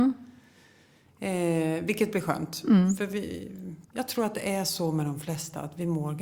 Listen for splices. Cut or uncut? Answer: cut